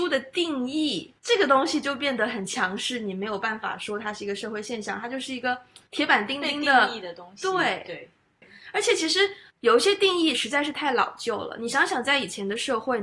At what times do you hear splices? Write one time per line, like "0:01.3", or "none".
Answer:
0:01.2
0:05.9
0:09.5